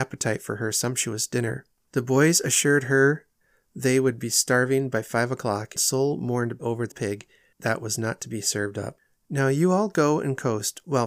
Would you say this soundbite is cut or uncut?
cut